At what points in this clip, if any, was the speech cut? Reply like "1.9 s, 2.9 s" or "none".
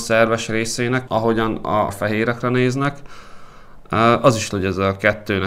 1.1 s, 1.9 s, 4.5 s